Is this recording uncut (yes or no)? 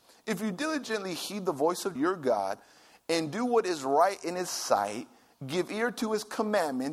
no